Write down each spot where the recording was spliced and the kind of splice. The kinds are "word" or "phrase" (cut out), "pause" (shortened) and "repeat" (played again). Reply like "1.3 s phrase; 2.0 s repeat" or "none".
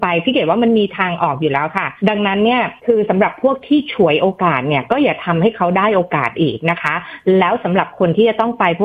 2.0 s pause; 2.8 s pause